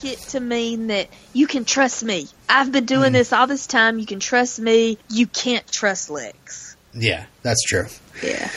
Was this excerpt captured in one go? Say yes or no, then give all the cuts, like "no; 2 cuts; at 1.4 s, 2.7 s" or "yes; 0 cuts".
no; 1 cut; at 5.0 s